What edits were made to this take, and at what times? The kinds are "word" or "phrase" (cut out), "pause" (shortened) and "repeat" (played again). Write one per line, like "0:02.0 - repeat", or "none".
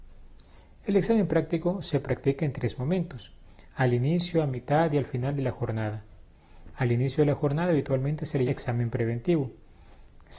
0:08.5 - word